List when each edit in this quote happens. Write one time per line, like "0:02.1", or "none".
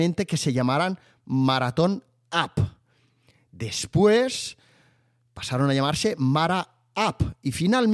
none